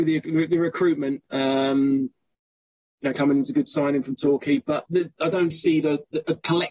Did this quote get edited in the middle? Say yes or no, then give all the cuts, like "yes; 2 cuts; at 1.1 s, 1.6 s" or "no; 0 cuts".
yes; 3 cuts; at 3.1 s, 4.9 s, 5.5 s